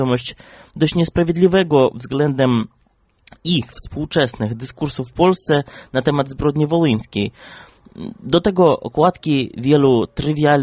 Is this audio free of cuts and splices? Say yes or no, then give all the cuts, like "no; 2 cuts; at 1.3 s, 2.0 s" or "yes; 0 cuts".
yes; 0 cuts